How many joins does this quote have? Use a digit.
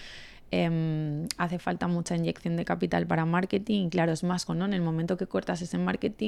1